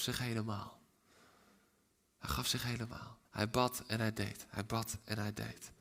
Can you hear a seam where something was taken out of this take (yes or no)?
yes